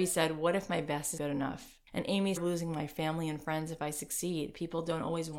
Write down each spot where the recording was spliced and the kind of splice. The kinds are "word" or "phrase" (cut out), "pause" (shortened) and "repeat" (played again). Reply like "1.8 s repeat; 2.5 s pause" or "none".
1.2 s word; 1.9 s pause; 2.4 s phrase